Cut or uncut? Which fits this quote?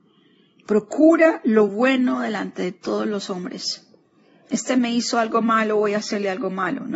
uncut